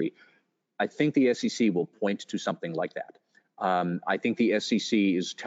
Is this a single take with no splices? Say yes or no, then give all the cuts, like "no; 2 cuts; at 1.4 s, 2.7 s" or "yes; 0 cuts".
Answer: yes; 0 cuts